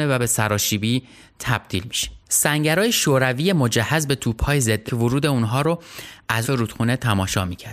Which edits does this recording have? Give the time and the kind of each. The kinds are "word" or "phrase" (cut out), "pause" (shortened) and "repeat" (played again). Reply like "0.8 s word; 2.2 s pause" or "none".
2.2 s pause; 4.9 s word; 6.4 s phrase